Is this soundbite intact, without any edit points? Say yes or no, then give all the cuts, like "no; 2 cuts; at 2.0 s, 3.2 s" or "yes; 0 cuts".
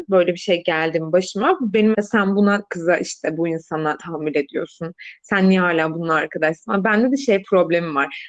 no; 3 cuts; at 1.9 s, 2.7 s, 4.0 s